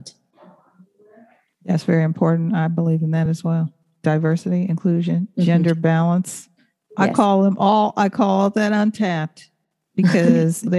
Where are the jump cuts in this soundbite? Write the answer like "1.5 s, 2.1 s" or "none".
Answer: none